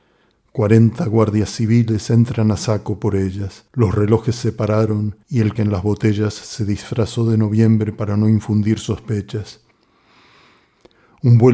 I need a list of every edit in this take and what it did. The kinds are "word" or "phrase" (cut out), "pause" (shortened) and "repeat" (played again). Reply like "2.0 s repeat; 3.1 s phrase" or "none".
3.7 s pause; 5.2 s pause; 5.6 s word